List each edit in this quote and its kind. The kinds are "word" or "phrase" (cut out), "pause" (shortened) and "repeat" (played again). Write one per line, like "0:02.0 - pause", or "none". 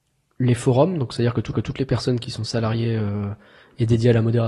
0:01.5 - repeat

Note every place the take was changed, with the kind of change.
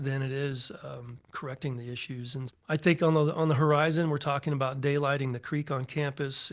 0:01.2 - pause
0:02.5 - word

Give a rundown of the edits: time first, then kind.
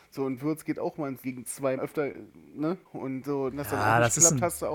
0:01.2 - word
0:01.8 - word
0:02.8 - pause
0:03.5 - word

